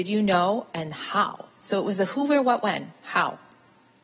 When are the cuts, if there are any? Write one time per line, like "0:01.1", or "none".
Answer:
none

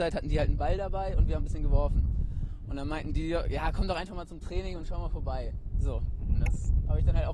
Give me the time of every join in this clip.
0:01.4

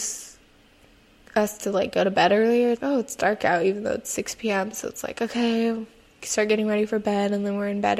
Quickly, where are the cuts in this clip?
0:02.8

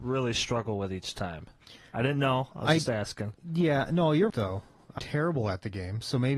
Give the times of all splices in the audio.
0:04.3
0:05.0

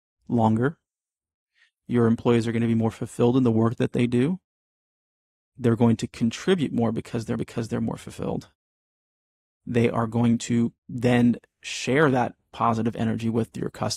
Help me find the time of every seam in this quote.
0:07.4
0:10.8

